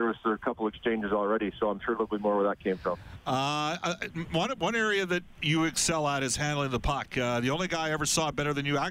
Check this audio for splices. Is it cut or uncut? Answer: uncut